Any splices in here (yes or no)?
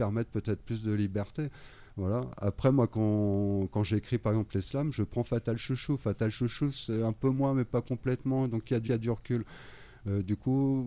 yes